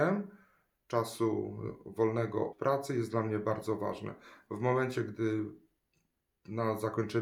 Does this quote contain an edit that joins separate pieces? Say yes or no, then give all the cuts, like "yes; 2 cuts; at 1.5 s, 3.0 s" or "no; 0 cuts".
yes; 1 cut; at 2.5 s